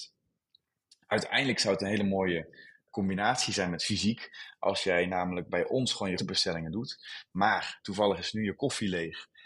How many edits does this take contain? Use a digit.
2